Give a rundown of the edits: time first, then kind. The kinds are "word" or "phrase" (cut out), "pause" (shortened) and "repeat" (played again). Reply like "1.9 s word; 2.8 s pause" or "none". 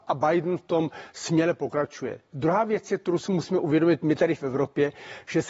none